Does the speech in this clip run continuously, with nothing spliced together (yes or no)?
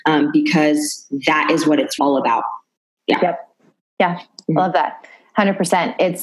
no